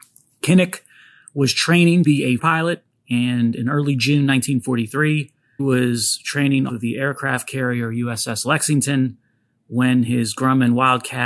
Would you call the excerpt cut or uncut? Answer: cut